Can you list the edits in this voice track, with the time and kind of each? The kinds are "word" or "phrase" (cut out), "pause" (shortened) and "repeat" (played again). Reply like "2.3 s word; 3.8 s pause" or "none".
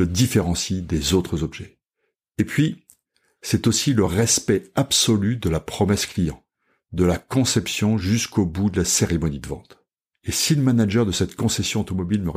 none